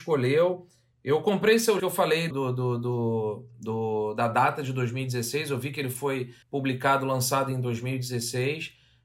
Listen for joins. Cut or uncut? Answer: cut